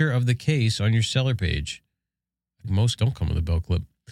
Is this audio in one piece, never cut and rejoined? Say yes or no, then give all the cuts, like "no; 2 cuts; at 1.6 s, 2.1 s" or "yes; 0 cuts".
no; 2 cuts; at 2.6 s, 3.0 s